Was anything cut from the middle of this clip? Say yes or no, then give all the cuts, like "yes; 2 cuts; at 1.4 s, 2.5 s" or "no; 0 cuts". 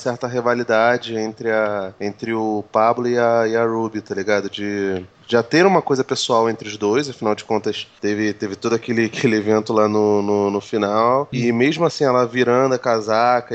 no; 0 cuts